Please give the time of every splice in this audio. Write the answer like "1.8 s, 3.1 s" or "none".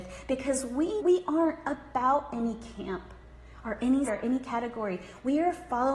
1.0 s, 4.1 s